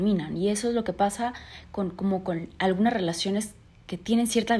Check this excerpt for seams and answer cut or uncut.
uncut